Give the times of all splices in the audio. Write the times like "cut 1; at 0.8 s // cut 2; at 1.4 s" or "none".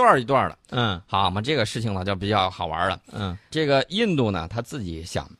cut 1; at 3.5 s